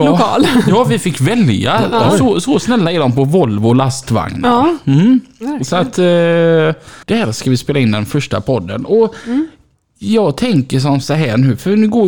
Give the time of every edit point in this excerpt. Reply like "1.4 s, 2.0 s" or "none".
7.0 s